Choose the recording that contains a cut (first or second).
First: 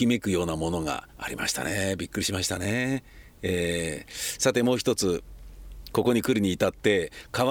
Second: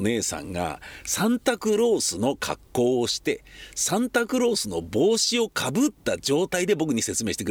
first